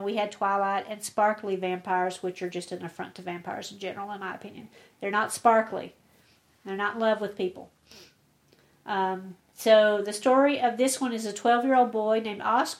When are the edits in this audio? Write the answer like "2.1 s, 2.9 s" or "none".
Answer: none